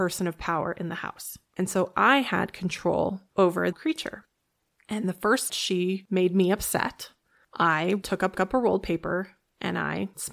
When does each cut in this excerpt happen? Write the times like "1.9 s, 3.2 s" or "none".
3.7 s, 5.5 s, 8.3 s